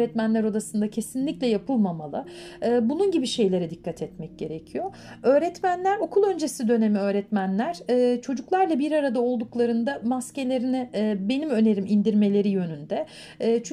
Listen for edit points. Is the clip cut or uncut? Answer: uncut